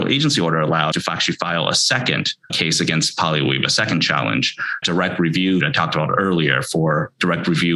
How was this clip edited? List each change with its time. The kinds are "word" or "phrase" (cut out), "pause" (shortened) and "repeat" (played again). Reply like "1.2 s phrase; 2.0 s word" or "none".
0.9 s word; 2.5 s word; 4.8 s phrase; 5.6 s word